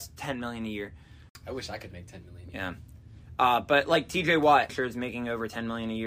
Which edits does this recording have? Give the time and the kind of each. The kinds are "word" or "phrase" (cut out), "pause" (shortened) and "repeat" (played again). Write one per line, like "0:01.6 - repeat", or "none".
0:04.7 - phrase

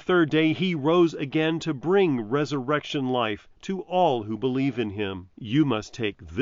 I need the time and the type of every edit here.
0:05.3 - pause

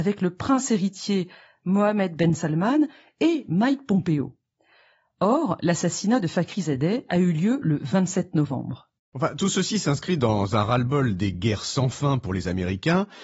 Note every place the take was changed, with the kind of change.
none

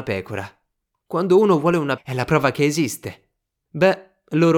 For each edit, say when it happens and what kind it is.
0:02.0 - word
0:03.4 - pause

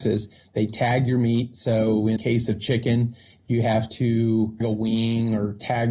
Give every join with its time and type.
0:02.2 - word
0:04.6 - word

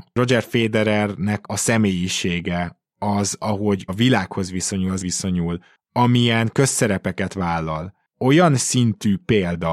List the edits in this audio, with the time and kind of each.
0:01.4 - word
0:03.9 - word
0:05.0 - word
0:08.1 - word

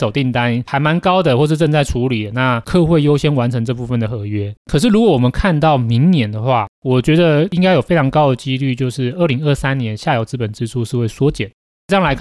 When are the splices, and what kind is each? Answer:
0:04.6 - pause
0:06.7 - pause

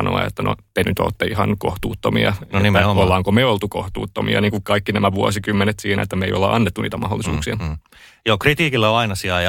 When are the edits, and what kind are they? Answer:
none

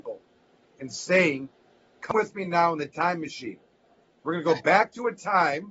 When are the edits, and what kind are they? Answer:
none

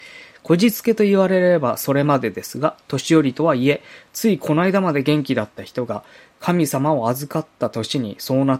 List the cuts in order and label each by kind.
none

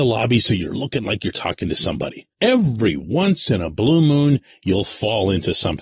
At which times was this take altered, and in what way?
0:02.3 - pause

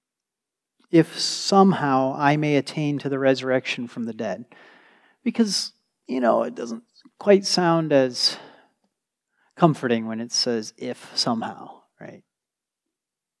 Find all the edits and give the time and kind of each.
none

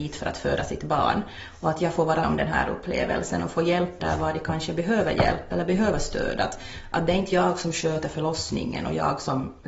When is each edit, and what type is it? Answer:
0:02.2 - word
0:04.0 - word

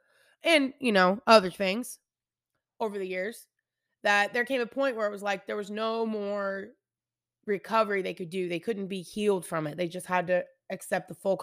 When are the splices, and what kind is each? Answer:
none

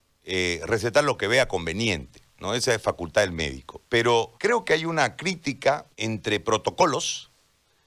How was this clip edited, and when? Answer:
0:04.4 - pause
0:05.9 - pause

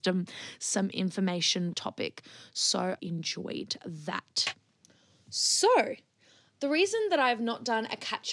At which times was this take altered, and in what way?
0:01.7 - phrase
0:03.0 - phrase

